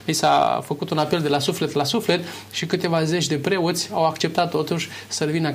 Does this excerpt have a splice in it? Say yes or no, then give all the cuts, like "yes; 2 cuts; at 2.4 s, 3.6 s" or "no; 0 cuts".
no; 0 cuts